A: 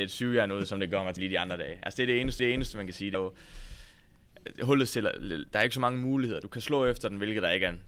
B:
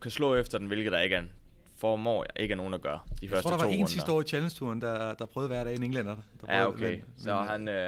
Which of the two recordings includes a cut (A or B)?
A